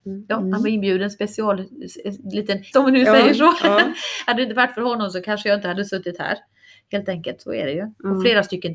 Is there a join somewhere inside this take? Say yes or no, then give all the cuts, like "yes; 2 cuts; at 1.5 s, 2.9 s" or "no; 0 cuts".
yes; 1 cut; at 2.7 s